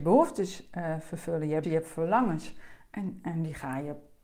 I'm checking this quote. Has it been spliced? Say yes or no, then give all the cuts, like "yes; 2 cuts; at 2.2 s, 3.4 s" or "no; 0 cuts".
yes; 1 cut; at 1.6 s